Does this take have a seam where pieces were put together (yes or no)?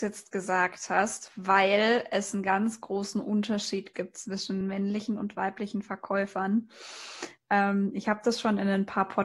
no